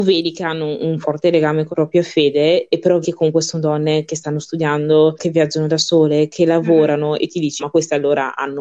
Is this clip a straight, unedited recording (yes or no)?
no